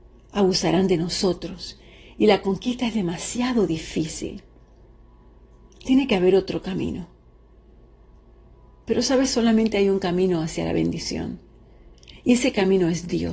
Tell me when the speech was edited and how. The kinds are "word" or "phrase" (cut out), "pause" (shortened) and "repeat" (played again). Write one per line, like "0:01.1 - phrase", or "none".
none